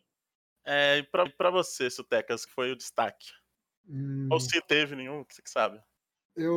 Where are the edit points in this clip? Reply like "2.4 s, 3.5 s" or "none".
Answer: 1.3 s, 2.5 s, 4.6 s